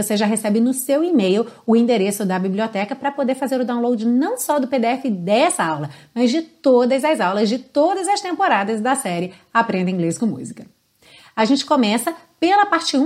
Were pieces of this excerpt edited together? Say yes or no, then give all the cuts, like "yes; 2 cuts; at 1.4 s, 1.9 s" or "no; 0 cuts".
no; 0 cuts